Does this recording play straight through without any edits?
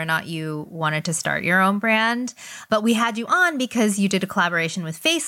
yes; 0 cuts

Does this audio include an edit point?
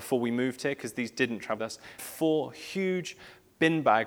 yes; 2 cuts; at 1.6 s, 2.0 s

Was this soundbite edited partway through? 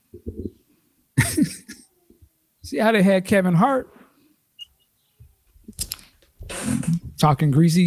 no; 0 cuts

